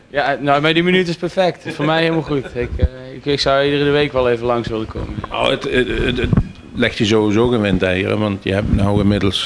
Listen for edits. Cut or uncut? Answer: uncut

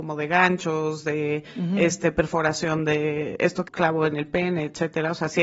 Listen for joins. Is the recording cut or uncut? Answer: cut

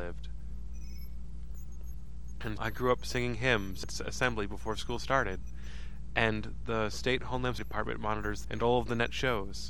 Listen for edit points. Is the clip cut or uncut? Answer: cut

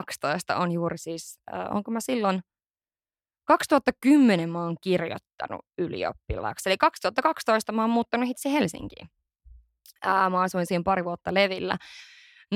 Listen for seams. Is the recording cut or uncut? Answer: uncut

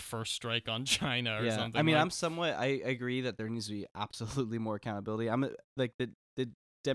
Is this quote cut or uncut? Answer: uncut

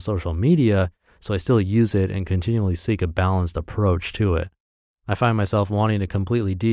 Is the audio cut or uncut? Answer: uncut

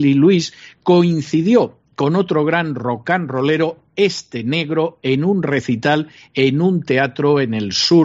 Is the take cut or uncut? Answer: uncut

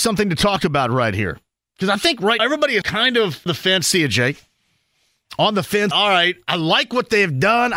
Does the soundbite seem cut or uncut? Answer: cut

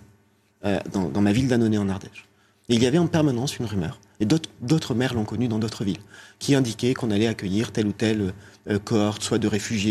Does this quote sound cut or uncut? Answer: uncut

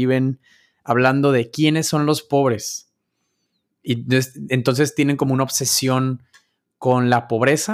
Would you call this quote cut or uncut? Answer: uncut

